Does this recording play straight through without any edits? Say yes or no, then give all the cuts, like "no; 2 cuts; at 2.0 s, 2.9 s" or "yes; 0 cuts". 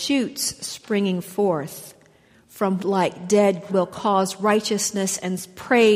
no; 2 cuts; at 2.8 s, 3.7 s